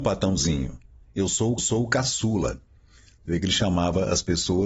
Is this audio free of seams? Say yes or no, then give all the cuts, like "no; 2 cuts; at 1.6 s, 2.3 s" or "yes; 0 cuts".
no; 1 cut; at 1.6 s